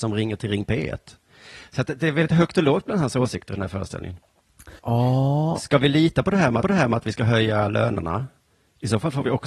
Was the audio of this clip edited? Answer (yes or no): yes